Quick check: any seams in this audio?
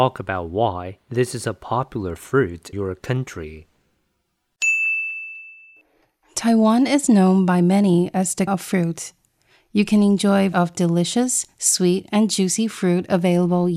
yes; 3 cuts; at 2.7 s, 8.5 s, 10.5 s

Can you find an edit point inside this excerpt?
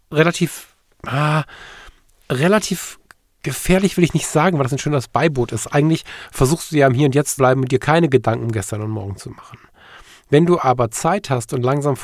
yes; 1 cut; at 7.4 s

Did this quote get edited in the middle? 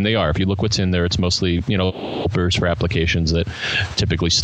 no; 0 cuts

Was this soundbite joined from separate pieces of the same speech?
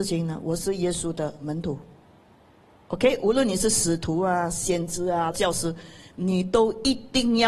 yes; 1 cut; at 5.3 s

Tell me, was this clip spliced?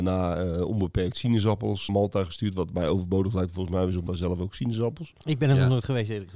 yes; 2 cuts; at 1.9 s, 4.1 s

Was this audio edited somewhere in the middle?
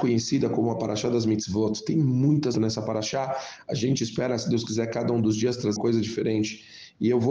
yes; 2 cuts; at 2.5 s, 5.8 s

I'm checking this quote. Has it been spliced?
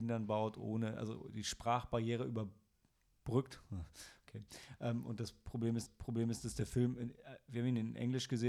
yes; 1 cut; at 5.9 s

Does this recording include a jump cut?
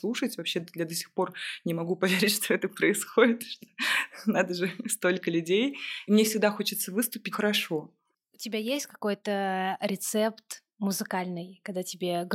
yes; 1 cut; at 7.3 s

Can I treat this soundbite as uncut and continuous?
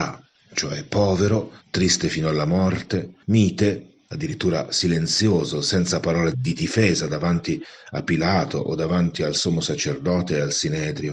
no; 3 cuts; at 1.6 s, 3.2 s, 6.3 s

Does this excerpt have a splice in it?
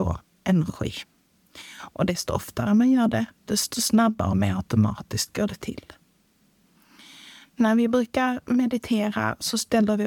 no; 0 cuts

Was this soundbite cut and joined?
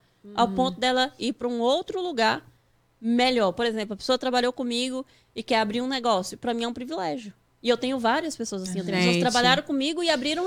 no; 0 cuts

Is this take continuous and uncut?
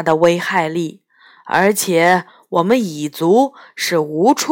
yes; 0 cuts

